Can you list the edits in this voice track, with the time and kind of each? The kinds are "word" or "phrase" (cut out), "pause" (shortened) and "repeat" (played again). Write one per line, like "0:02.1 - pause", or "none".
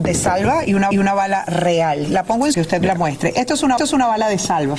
0:00.9 - repeat
0:02.5 - phrase
0:03.8 - repeat